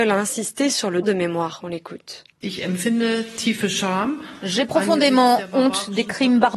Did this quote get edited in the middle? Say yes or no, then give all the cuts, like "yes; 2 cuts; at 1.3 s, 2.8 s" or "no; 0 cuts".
yes; 2 cuts; at 1.0 s, 2.3 s